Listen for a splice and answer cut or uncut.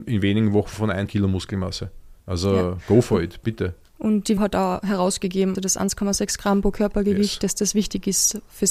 cut